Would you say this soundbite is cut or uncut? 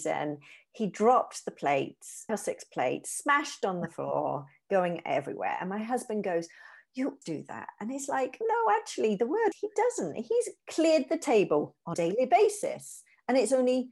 cut